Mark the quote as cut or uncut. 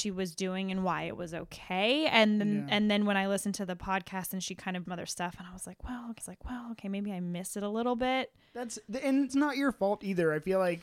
cut